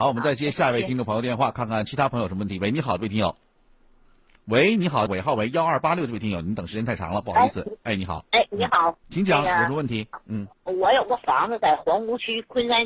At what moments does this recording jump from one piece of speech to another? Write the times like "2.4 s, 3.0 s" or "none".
5.1 s, 9.0 s, 10.5 s